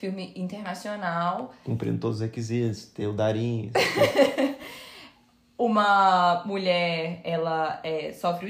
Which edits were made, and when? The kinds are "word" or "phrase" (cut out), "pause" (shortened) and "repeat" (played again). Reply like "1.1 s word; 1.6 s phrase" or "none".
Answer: none